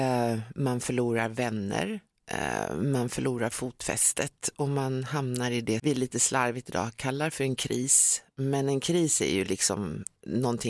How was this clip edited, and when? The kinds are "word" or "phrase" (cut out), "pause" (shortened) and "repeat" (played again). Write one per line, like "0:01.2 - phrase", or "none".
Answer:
0:05.8 - word